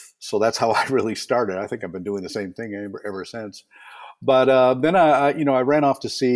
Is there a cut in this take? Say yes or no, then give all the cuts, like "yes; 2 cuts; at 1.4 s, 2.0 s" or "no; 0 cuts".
no; 0 cuts